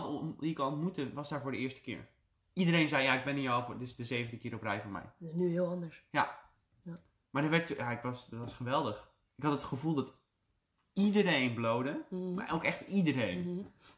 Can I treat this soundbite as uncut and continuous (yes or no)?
yes